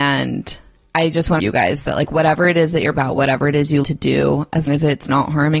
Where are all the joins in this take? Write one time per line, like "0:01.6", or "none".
0:01.4
0:02.9
0:03.8
0:04.7